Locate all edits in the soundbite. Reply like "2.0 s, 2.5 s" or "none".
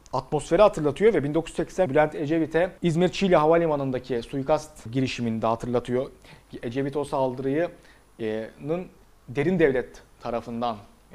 1.9 s, 2.8 s, 4.9 s, 9.0 s